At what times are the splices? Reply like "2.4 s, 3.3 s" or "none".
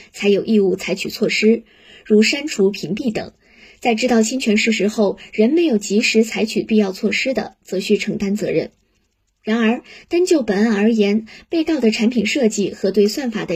none